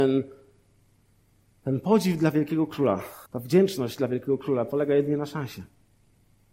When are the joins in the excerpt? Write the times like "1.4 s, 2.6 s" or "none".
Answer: 3.3 s